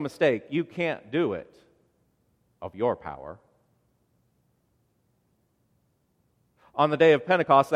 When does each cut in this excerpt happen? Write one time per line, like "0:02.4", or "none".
none